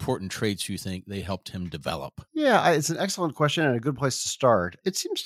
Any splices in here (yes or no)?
yes